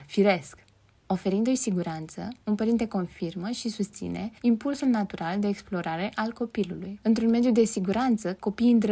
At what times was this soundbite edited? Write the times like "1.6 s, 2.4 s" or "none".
4.4 s